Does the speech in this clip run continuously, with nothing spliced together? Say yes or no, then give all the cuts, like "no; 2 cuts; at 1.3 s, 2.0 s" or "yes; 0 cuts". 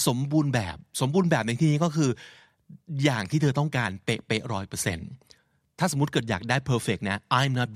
yes; 0 cuts